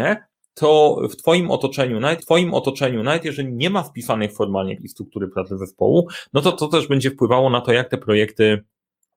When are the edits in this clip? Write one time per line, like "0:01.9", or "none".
0:02.2
0:04.8